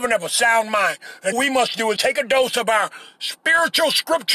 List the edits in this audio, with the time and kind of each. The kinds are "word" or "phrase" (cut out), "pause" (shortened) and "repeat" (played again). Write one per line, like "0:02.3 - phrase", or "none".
0:01.3 - word
0:02.0 - word